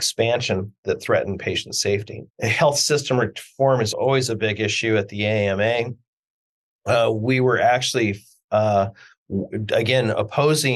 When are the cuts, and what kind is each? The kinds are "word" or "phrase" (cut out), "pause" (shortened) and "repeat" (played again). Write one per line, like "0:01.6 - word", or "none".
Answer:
0:02.3 - pause
0:03.9 - word